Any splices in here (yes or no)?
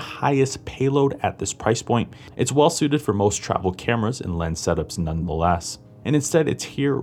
no